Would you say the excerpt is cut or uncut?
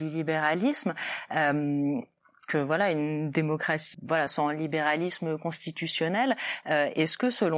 cut